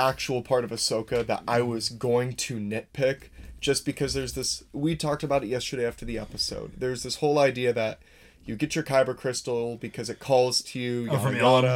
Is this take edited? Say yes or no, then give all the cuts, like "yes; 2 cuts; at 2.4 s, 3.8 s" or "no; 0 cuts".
no; 0 cuts